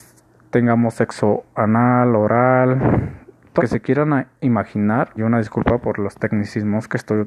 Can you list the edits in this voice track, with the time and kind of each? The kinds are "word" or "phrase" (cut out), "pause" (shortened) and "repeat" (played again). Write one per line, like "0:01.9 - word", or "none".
0:03.6 - word
0:05.2 - word